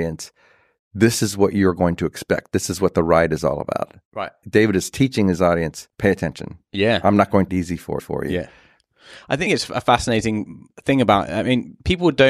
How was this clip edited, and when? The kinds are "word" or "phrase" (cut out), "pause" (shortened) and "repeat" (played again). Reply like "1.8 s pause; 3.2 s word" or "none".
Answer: 4.4 s word; 5.9 s pause; 7.5 s phrase; 8.0 s repeat; 9.5 s phrase